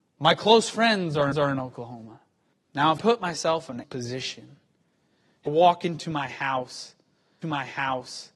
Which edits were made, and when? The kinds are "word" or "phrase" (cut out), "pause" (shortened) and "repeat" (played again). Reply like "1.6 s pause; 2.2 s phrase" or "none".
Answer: 1.3 s repeat; 2.5 s pause; 3.0 s word; 3.8 s word; 5.5 s word; 7.4 s repeat